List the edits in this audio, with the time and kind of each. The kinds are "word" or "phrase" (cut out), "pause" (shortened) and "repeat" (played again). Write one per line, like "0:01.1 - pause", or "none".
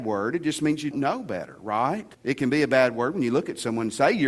0:00.9 - word
0:02.1 - pause